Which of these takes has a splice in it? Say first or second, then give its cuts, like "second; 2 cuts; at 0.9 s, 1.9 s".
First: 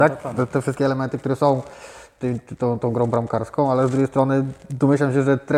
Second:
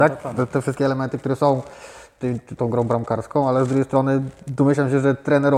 second; 1 cut; at 2.6 s